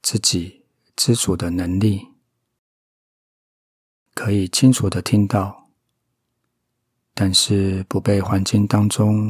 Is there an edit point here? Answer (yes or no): no